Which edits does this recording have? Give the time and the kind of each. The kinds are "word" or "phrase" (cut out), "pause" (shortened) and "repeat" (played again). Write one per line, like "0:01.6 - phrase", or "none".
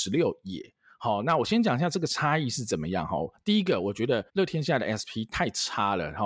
0:04.3 - pause